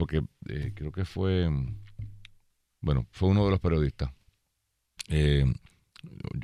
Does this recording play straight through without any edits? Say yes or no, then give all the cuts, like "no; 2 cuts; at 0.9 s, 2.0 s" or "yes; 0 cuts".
yes; 0 cuts